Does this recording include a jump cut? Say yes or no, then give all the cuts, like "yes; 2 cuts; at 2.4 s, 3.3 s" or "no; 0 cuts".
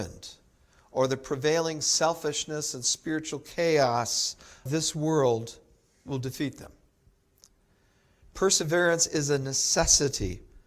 yes; 1 cut; at 4.7 s